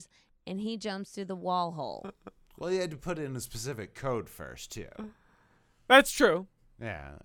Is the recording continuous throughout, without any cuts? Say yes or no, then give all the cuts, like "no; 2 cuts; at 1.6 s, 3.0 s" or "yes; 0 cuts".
yes; 0 cuts